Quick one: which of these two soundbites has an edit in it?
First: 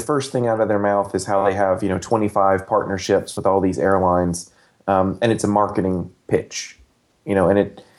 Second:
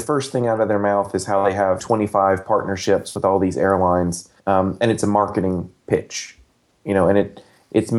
second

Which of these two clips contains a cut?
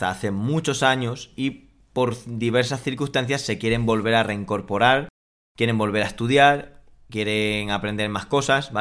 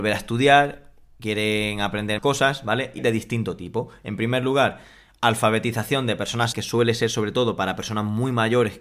second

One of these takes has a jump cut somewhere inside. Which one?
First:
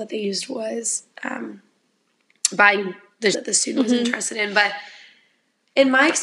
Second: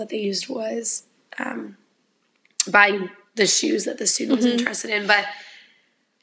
first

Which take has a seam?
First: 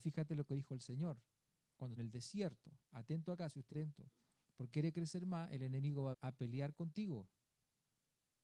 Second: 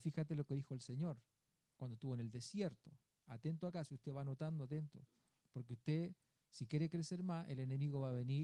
first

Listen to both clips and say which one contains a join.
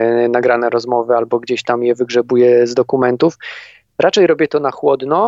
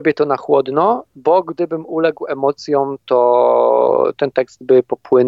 second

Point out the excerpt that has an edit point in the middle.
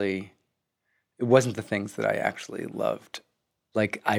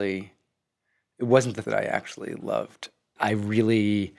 second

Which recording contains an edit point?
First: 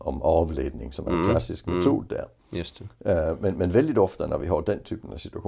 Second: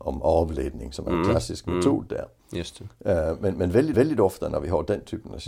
second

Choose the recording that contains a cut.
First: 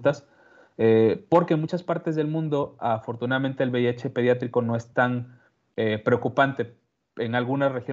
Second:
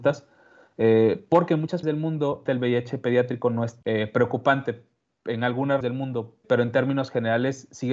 second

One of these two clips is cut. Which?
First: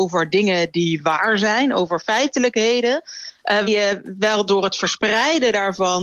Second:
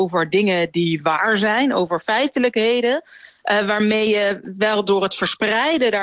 first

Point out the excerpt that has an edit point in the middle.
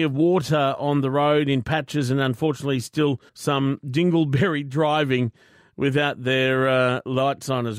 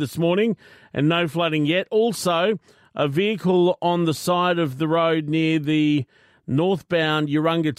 first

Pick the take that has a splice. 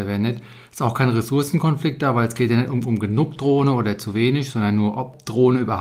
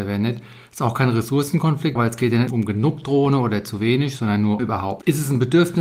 second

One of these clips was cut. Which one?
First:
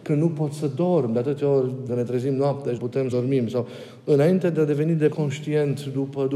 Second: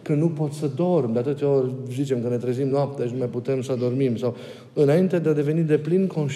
first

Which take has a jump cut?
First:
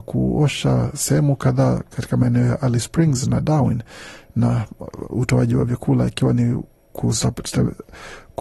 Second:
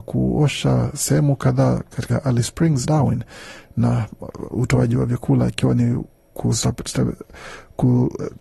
second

